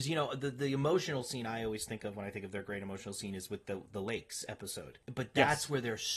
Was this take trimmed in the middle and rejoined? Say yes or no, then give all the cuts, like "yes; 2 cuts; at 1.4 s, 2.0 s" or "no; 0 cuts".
yes; 1 cut; at 5.0 s